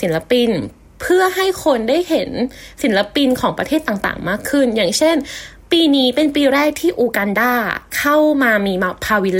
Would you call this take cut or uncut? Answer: uncut